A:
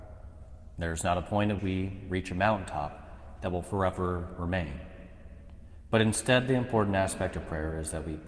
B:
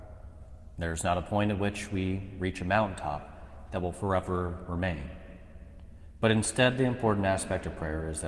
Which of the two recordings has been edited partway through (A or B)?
A